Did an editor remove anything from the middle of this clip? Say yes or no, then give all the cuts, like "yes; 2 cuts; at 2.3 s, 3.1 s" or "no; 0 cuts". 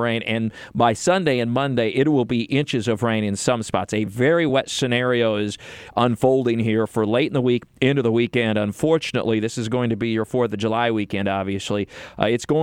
no; 0 cuts